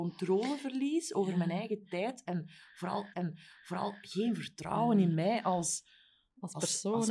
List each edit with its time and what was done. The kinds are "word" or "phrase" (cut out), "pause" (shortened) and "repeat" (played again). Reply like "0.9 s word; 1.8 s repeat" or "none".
3.1 s repeat